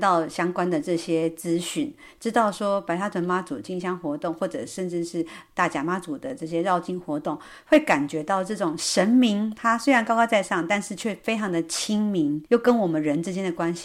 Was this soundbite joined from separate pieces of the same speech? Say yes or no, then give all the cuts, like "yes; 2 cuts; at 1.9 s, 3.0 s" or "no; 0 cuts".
yes; 1 cut; at 12.5 s